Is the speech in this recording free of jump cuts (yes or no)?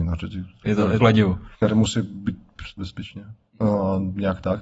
no